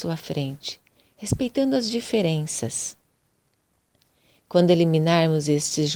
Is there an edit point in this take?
no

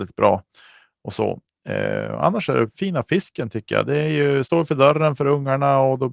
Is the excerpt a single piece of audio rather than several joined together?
no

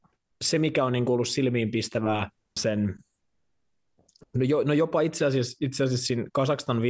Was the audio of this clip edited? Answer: yes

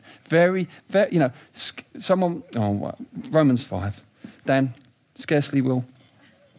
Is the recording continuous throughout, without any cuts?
yes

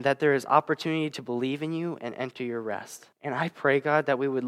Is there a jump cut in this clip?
yes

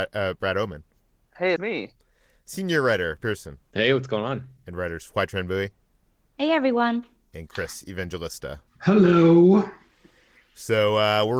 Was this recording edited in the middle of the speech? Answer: yes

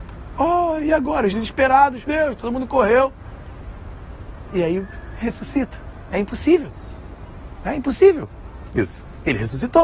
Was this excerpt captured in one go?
no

